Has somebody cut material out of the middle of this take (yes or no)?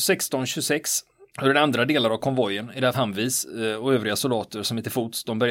yes